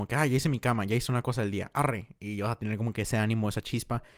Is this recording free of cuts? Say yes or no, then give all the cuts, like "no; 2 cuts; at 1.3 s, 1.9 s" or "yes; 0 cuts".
yes; 0 cuts